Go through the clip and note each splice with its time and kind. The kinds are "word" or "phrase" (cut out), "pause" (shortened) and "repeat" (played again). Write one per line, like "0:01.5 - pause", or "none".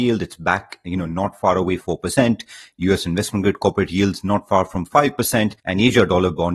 0:01.8 - word
0:05.6 - pause